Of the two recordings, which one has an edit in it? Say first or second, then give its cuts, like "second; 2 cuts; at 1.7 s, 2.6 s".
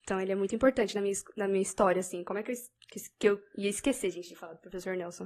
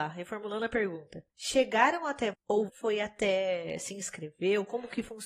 second; 3 cuts; at 1.3 s, 2.3 s, 2.7 s